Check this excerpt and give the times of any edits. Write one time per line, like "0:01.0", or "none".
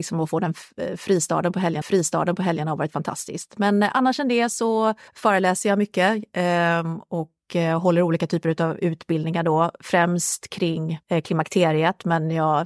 0:01.8
0:05.1
0:11.0